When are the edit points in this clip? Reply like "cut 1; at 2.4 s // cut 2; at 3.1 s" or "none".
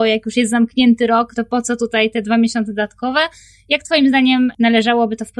cut 1; at 1.3 s